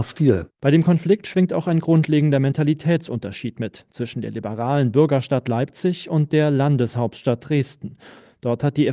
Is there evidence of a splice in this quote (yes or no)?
no